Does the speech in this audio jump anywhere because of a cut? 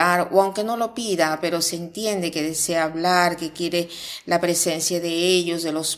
no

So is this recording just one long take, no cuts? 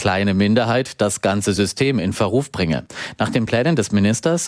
yes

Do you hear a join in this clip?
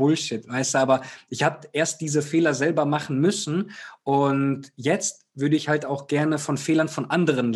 no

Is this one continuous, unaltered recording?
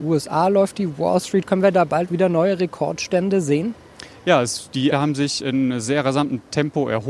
no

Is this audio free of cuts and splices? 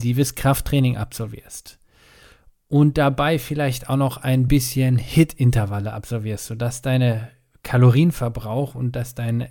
yes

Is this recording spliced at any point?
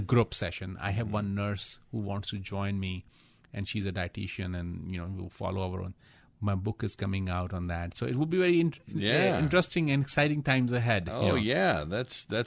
no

